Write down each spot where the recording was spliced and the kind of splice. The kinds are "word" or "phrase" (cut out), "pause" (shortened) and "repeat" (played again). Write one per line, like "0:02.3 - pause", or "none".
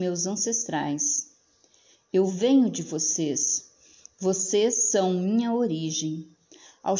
none